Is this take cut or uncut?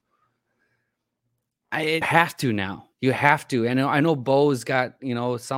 cut